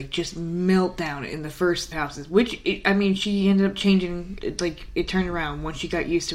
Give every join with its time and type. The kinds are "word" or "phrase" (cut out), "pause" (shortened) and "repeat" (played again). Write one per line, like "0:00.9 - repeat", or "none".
0:01.9 - phrase
0:04.4 - word

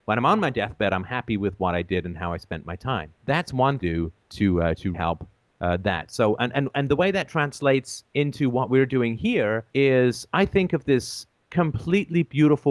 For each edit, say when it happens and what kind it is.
0:03.1 - pause
0:03.8 - phrase
0:04.2 - pause
0:04.9 - word
0:08.1 - pause
0:09.7 - pause

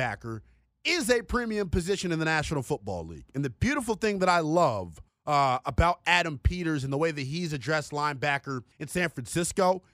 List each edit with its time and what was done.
0:05.1 - pause
0:08.7 - pause

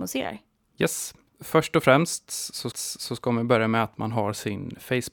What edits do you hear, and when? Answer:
0:02.7 - repeat

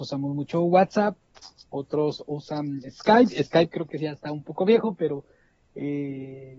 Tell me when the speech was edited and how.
none

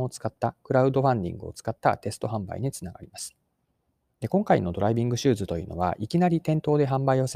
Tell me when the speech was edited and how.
0:03.6 - pause

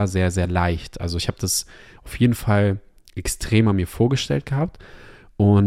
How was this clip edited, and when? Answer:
none

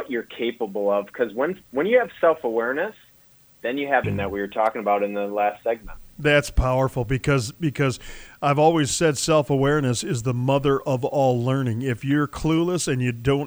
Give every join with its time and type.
0:04.0 - phrase

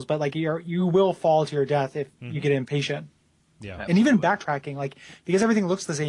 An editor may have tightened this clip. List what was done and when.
none

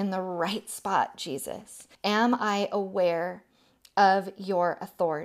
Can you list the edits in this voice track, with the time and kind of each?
0:01.9 - pause

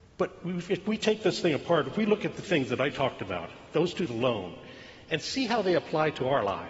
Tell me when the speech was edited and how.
0:02.4 - word
0:02.9 - word
0:04.1 - word

